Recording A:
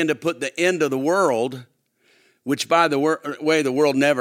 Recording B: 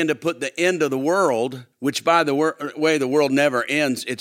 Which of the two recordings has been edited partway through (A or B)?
B